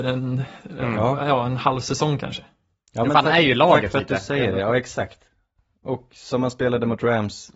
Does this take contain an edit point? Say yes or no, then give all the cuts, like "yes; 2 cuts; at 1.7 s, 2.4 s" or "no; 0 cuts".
no; 0 cuts